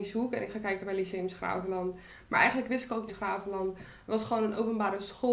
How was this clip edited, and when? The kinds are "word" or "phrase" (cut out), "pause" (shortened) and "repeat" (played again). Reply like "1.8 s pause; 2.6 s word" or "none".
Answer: 3.1 s phrase